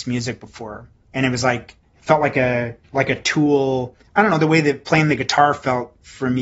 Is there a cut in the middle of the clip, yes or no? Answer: yes